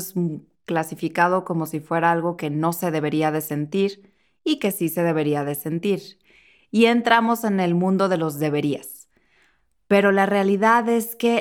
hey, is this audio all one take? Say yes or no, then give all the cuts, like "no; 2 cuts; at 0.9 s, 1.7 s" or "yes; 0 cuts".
yes; 0 cuts